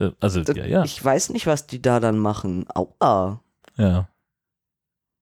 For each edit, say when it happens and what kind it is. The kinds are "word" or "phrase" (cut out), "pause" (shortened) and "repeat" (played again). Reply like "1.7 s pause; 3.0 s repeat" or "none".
none